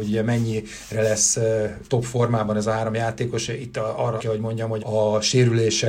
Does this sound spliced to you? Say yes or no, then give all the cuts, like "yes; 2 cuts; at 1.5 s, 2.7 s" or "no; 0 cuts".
yes; 3 cuts; at 3.5 s, 4.2 s, 4.8 s